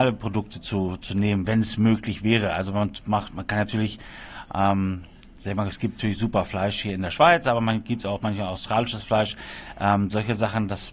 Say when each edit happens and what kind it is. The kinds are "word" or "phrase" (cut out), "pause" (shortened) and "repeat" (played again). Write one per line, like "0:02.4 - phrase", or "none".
none